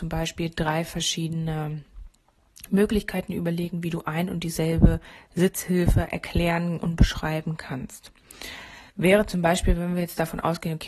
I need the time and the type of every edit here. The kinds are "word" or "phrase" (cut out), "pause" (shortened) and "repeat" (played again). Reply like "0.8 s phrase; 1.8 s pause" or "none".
8.9 s pause